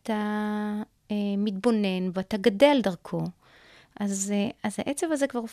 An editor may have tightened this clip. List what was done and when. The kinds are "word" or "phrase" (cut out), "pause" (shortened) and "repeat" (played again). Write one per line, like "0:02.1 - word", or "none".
0:02.1 - word